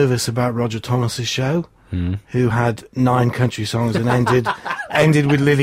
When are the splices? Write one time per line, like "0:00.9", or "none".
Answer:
none